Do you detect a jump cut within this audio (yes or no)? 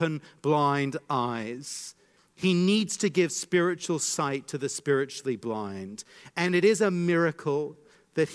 no